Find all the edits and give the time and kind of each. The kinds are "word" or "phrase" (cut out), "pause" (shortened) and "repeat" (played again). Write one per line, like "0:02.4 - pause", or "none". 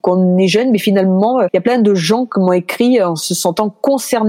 0:01.5 - word